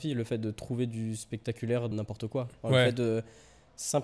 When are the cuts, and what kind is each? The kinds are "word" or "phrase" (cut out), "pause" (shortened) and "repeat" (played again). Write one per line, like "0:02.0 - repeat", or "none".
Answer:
0:01.9 - word